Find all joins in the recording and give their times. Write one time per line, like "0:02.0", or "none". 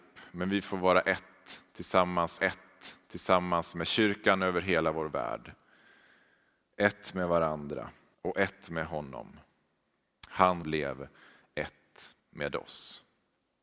0:02.4
0:08.1
0:10.6
0:12.2